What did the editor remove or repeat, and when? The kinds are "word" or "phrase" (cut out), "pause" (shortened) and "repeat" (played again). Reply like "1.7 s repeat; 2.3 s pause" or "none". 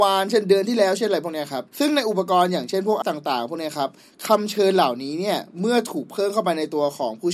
1.7 s pause; 3.0 s word